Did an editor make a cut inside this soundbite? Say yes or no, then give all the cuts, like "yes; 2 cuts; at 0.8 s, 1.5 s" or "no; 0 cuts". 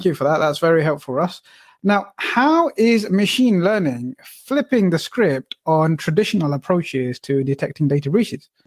no; 0 cuts